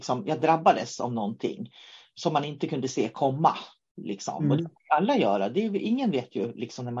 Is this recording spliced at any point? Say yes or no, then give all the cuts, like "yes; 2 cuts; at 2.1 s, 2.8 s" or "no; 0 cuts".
no; 0 cuts